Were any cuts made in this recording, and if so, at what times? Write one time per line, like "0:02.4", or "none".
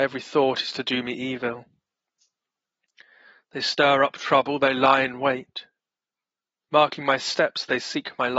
none